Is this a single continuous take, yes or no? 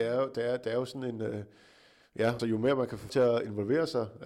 no